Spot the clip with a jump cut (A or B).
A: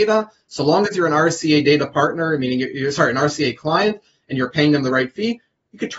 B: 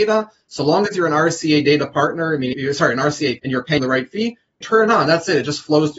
B